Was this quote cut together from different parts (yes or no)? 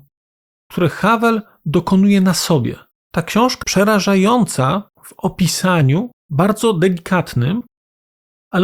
yes